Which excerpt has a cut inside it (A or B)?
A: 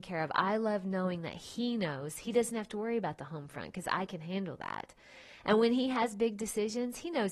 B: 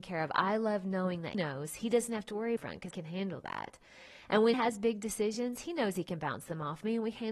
B